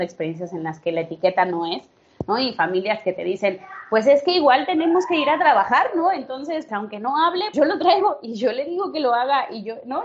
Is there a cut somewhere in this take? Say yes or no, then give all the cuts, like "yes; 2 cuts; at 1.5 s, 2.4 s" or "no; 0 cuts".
yes; 2 cuts; at 6.7 s, 7.5 s